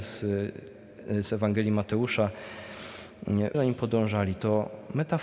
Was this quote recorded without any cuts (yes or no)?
no